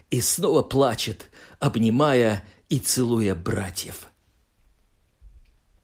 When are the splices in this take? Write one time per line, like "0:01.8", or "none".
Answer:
none